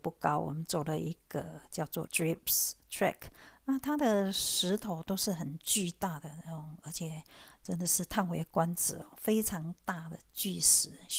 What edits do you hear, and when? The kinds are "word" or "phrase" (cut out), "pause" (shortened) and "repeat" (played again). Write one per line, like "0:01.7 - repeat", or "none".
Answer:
0:02.1 - word